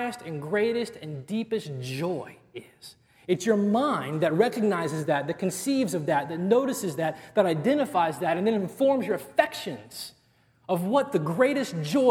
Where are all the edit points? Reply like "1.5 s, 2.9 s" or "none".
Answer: none